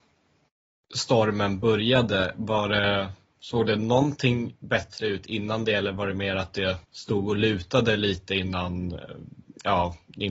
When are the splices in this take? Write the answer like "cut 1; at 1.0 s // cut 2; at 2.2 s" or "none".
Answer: cut 1; at 6.8 s